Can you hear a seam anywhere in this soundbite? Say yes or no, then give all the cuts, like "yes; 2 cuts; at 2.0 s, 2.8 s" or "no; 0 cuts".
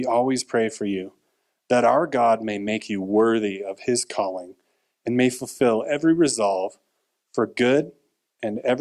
no; 0 cuts